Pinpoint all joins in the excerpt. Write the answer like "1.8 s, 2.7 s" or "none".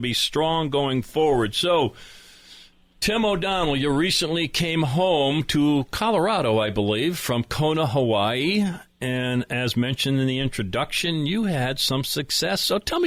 none